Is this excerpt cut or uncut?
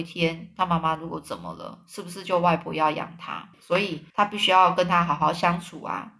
cut